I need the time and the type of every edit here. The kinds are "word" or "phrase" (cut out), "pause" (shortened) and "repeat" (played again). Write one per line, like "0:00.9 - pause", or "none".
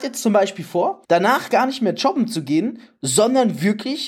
0:01.0 - pause